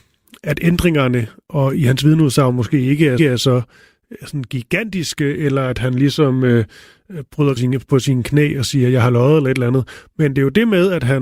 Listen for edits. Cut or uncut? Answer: cut